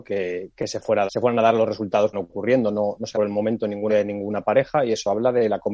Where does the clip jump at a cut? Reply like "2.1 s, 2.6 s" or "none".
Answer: 1.1 s, 2.1 s, 3.1 s, 3.9 s